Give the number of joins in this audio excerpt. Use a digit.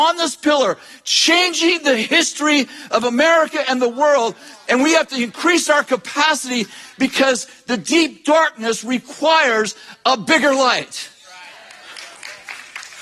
0